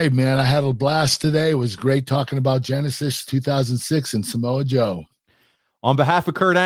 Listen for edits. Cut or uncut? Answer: uncut